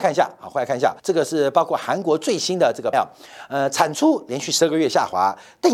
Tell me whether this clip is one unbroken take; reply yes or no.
no